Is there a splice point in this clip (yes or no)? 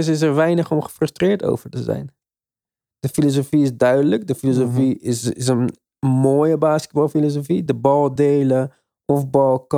no